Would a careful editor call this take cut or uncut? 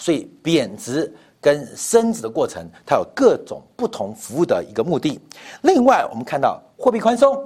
uncut